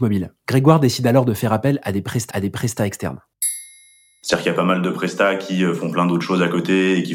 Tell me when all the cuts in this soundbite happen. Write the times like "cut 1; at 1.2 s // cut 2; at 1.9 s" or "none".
cut 1; at 2.3 s